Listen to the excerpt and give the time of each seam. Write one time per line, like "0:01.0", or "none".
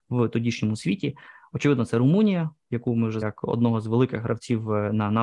0:03.2